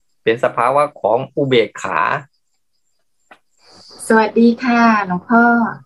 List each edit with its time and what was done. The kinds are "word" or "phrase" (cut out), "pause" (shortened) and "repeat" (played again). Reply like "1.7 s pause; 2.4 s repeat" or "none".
none